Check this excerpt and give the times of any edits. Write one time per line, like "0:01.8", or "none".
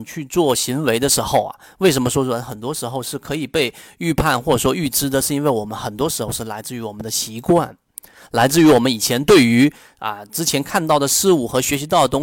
none